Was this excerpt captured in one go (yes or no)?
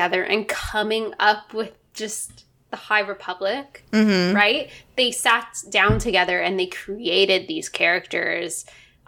yes